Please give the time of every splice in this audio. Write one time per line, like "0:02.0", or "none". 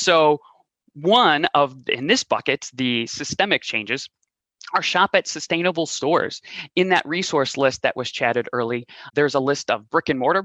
0:09.1